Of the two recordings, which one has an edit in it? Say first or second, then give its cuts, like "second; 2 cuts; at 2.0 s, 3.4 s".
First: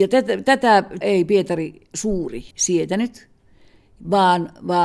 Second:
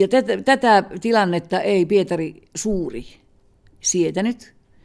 first; 2 cuts; at 1.0 s, 2.5 s